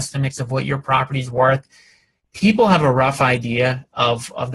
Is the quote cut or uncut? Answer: uncut